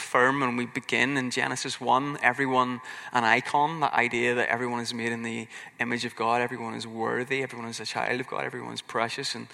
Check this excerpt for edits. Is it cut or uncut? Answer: uncut